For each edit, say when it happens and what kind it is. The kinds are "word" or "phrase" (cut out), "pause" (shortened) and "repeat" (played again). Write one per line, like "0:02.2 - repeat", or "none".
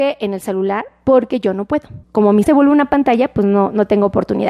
0:02.0 - pause
0:02.4 - word